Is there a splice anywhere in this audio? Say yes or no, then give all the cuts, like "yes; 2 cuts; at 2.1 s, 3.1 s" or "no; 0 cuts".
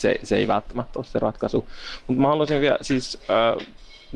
no; 0 cuts